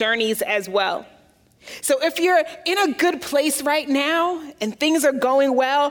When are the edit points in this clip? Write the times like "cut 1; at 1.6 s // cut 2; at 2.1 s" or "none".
none